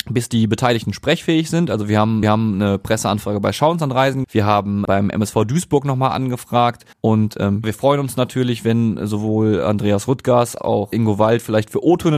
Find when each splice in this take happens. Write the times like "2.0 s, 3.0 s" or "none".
2.2 s, 4.2 s, 4.8 s, 6.9 s, 7.6 s, 10.6 s, 10.9 s

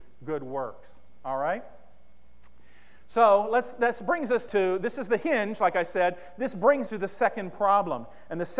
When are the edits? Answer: 4.5 s, 6.9 s

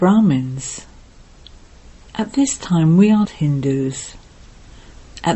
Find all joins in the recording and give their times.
3.2 s

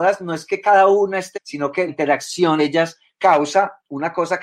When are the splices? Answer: 1.3 s, 1.9 s, 2.6 s

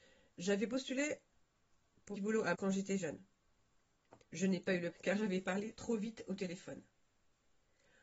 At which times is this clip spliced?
2.1 s, 2.5 s, 4.2 s, 4.9 s

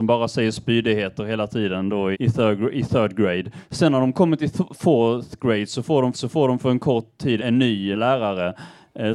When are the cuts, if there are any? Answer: 2.1 s, 6.1 s, 7.4 s, 7.9 s

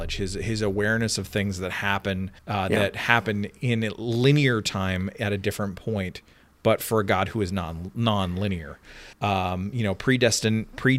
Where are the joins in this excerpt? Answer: 2.4 s, 9.1 s

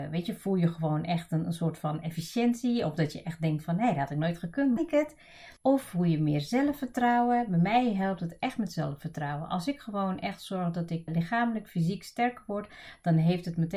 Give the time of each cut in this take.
4.8 s, 5.6 s, 11.1 s

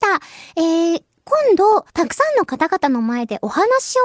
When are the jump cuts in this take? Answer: 1.9 s

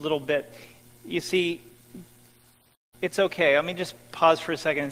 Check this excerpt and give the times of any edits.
none

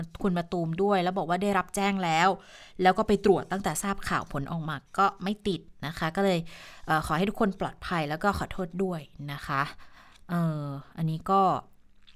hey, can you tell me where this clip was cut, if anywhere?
none

